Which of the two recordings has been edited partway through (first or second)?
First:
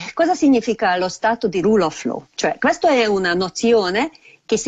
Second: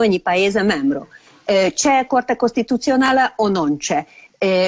first